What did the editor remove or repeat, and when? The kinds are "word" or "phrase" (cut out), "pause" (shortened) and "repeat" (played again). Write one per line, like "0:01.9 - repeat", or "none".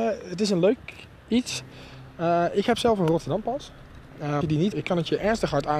0:04.4 - word
0:04.7 - word